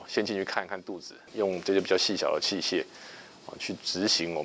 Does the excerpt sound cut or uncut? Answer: uncut